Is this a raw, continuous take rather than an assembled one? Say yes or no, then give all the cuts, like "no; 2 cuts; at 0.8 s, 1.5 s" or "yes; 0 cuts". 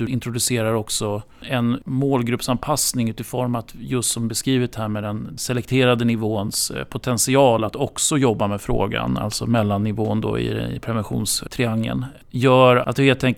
yes; 0 cuts